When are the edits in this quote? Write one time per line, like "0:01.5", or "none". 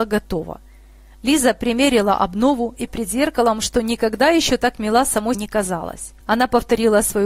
0:02.9
0:05.3
0:06.2